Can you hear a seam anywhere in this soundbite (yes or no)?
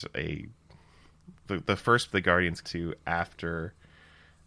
yes